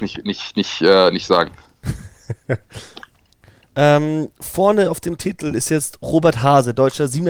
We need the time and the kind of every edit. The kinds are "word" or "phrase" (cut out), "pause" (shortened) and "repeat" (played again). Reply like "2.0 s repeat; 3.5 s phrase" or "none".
none